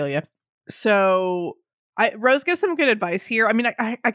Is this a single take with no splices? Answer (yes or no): yes